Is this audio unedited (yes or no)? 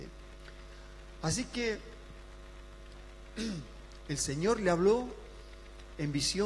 yes